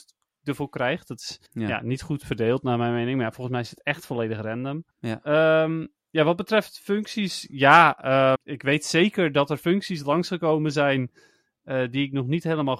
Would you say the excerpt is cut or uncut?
cut